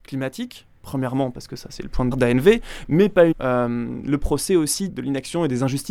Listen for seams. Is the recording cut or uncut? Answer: cut